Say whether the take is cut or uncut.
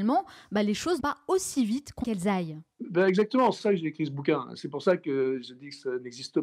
cut